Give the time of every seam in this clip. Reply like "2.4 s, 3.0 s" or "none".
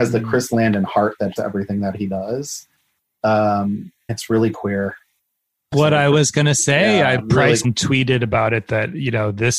1.4 s, 4.1 s, 5.7 s, 7.2 s, 7.6 s